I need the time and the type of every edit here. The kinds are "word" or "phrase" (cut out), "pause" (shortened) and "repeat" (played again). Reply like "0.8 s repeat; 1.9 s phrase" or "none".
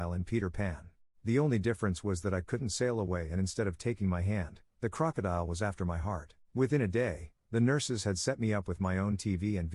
1.0 s pause; 6.4 s pause